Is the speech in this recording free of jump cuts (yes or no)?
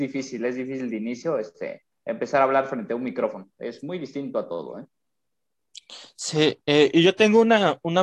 yes